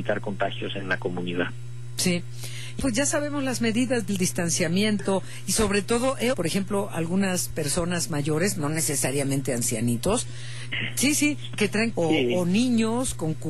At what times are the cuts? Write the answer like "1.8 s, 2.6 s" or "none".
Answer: 2.8 s, 4.1 s, 6.3 s, 10.7 s, 11.9 s